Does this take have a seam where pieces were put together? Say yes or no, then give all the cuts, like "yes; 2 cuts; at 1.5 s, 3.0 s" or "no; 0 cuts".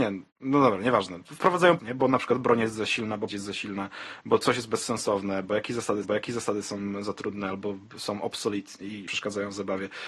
yes; 4 cuts; at 1.8 s, 3.3 s, 6.0 s, 9.1 s